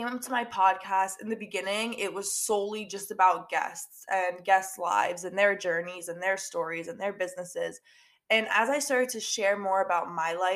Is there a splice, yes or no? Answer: no